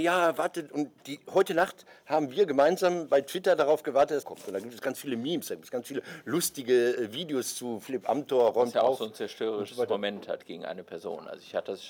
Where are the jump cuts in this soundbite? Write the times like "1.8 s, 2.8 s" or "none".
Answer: 4.2 s